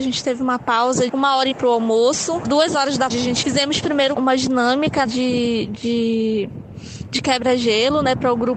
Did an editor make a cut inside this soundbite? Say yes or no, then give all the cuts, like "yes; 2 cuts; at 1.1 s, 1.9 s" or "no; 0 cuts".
yes; 8 cuts; at 1.1 s, 1.5 s, 2.4 s, 3.1 s, 3.4 s, 4.1 s, 5.0 s, 5.7 s